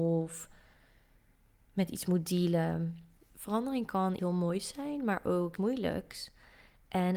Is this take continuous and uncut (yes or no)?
no